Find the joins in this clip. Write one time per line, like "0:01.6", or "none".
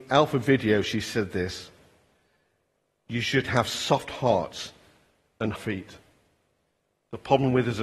0:05.6